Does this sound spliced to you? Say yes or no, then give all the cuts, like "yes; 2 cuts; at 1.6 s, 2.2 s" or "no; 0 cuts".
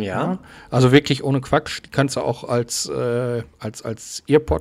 yes; 1 cut; at 3.5 s